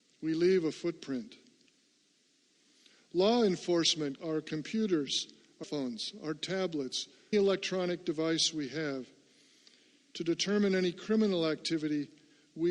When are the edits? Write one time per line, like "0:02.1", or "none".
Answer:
0:04.2
0:05.6
0:07.3